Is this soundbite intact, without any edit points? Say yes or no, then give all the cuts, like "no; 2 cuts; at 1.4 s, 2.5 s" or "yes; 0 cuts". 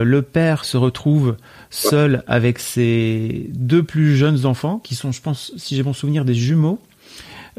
yes; 0 cuts